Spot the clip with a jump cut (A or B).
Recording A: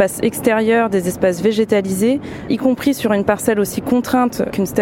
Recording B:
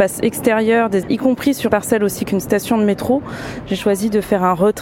B